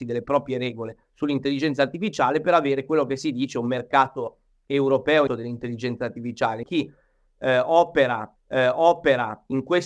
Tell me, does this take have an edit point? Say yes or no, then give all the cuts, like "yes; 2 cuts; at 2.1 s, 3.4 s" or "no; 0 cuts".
yes; 4 cuts; at 1.0 s, 5.3 s, 6.6 s, 8.4 s